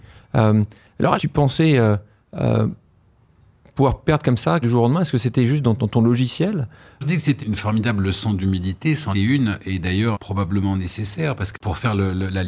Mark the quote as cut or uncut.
cut